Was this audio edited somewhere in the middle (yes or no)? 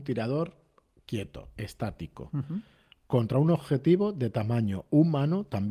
no